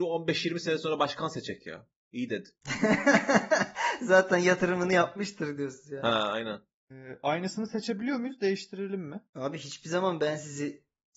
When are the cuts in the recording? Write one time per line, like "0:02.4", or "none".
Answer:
0:09.3